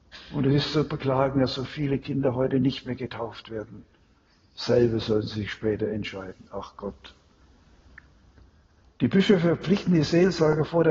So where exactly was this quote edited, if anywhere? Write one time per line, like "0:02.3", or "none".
none